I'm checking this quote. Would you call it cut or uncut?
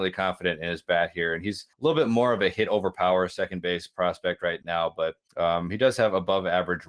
cut